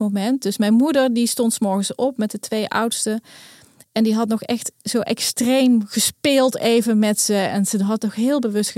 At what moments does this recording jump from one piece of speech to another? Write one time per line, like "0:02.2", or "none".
none